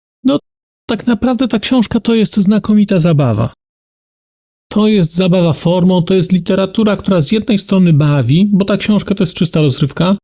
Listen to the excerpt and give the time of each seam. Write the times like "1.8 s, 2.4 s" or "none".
none

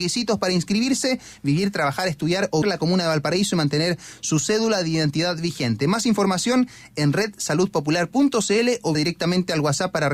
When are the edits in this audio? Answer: 2.6 s, 8.9 s

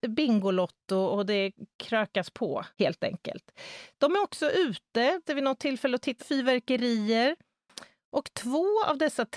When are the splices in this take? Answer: 1.7 s, 2.7 s, 5.2 s, 6.2 s

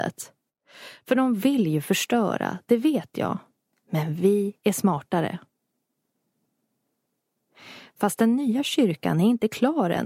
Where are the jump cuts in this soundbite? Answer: none

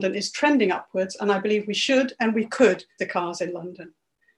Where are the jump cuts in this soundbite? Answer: 3.0 s

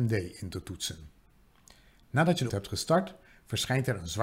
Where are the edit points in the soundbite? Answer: 2.5 s

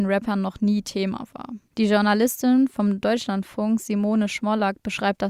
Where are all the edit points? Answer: 1.7 s

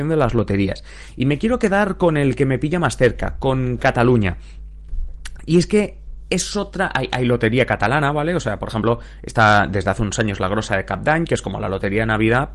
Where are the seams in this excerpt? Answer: none

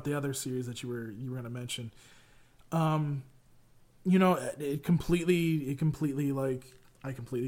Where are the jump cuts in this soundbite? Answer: none

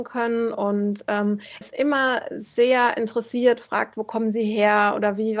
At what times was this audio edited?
1.6 s

